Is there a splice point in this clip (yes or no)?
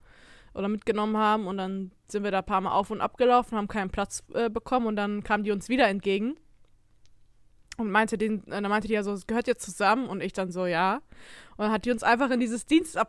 no